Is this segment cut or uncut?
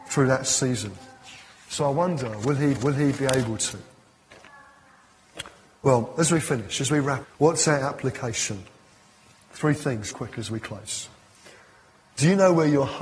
cut